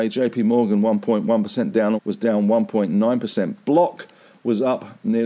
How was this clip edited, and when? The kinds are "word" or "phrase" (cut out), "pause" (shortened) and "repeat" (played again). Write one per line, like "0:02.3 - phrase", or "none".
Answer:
0:02.0 - phrase